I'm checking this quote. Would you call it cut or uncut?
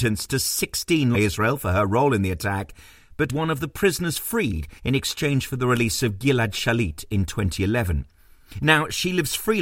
cut